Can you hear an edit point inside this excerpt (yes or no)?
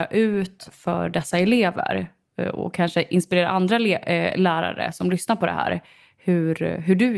no